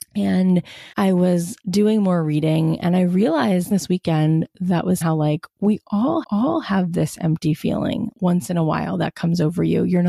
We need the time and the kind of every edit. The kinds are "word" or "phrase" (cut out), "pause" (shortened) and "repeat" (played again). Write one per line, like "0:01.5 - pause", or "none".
0:00.9 - pause
0:03.7 - phrase
0:05.0 - word
0:06.2 - repeat
0:08.1 - word